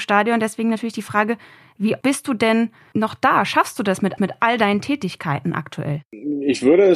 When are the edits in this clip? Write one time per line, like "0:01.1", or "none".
0:02.0
0:02.9
0:04.2

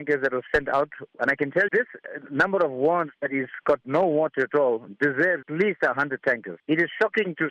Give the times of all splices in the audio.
0:01.7
0:05.4

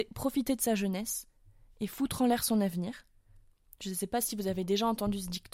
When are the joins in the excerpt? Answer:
none

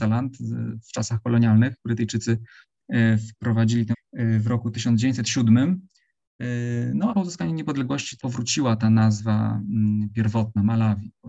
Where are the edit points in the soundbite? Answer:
0:03.9
0:07.1
0:08.2

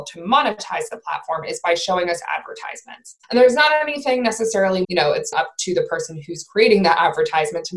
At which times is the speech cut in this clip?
0:03.2
0:04.8
0:05.3

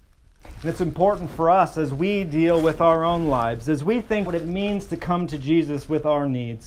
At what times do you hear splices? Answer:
0:04.3

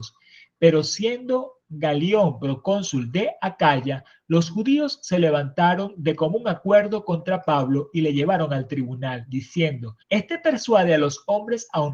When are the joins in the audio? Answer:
0:10.0

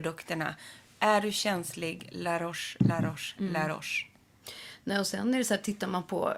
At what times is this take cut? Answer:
none

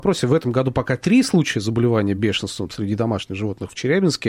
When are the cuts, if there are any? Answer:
none

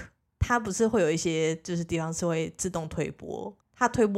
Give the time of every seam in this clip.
none

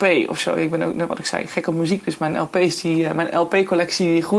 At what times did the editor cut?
none

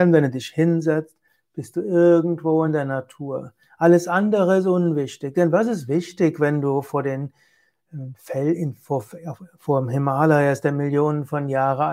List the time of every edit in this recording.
none

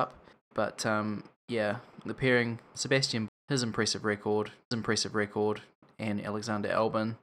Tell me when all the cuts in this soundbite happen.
0:02.0
0:03.3
0:04.7

